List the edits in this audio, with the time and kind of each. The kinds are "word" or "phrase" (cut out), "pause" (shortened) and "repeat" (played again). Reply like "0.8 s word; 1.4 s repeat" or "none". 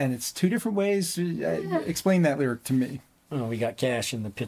none